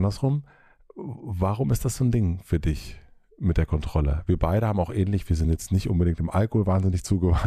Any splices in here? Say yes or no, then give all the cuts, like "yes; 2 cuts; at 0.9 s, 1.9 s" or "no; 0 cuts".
no; 0 cuts